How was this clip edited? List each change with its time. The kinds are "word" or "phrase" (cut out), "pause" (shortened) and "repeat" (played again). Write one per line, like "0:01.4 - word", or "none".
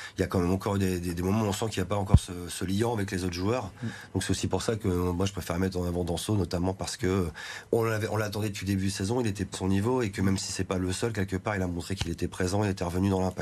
0:09.5 - word